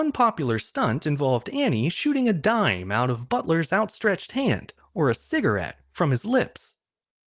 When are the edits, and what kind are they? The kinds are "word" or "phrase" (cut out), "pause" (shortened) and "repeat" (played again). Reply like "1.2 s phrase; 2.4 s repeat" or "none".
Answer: none